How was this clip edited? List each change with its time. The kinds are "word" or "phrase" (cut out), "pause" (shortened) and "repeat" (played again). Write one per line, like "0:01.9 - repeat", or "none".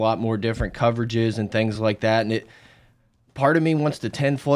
none